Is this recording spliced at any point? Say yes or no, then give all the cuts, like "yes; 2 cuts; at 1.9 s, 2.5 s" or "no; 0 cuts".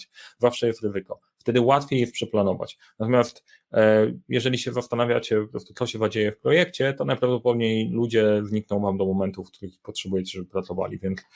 no; 0 cuts